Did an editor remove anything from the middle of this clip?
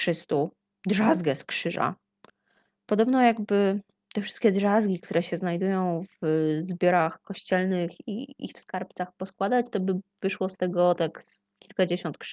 no; 0 cuts

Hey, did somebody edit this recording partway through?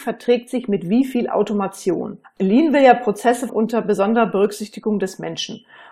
yes; 2 cuts; at 2.2 s, 3.5 s

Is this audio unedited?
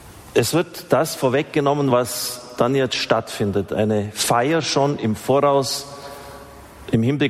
yes; 0 cuts

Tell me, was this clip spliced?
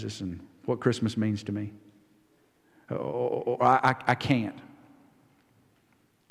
yes; 1 cut; at 3.6 s

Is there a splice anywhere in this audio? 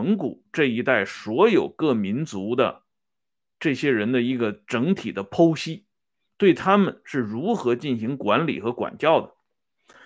no; 0 cuts

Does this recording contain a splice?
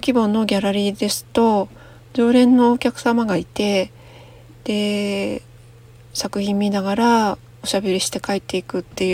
no; 0 cuts

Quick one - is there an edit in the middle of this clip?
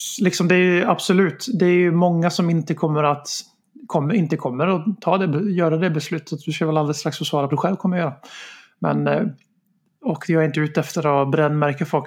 yes; 1 cut; at 7.5 s

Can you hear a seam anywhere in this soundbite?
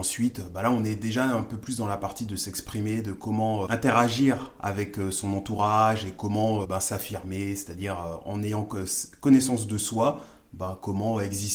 yes; 2 cuts; at 3.7 s, 6.6 s

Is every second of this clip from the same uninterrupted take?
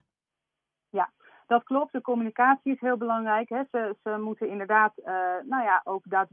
yes; 0 cuts

